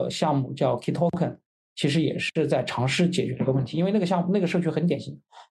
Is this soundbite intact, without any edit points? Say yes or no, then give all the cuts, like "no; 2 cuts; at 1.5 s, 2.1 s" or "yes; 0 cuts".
yes; 0 cuts